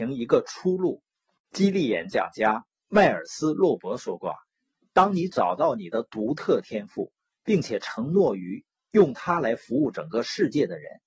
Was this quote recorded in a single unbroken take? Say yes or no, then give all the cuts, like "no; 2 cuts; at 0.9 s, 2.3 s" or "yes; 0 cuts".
yes; 0 cuts